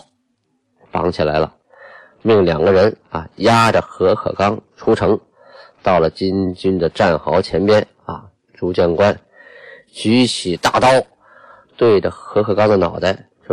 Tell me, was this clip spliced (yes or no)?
no